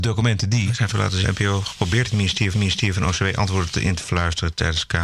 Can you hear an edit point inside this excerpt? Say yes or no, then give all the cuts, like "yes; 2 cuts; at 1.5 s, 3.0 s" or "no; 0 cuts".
yes; 4 cuts; at 0.9 s, 1.2 s, 2.1 s, 2.5 s